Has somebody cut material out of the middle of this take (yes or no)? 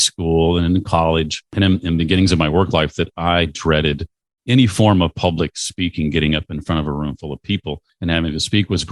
no